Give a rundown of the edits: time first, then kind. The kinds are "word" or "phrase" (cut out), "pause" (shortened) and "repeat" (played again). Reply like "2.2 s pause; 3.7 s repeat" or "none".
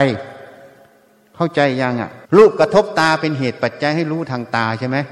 2.2 s pause